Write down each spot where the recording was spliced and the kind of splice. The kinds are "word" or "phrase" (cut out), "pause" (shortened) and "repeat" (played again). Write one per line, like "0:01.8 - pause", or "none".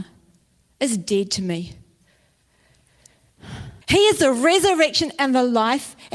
0:03.8 - pause